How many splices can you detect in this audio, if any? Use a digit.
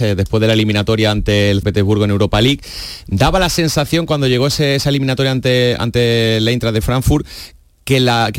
1